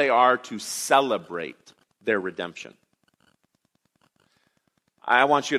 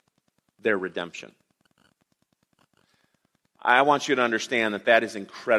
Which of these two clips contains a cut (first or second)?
first